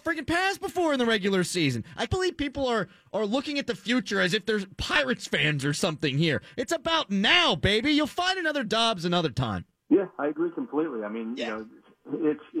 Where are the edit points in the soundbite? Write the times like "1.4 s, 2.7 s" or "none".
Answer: 2.1 s, 9.7 s